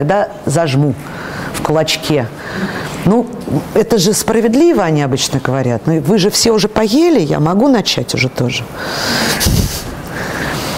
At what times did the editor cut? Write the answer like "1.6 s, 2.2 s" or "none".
none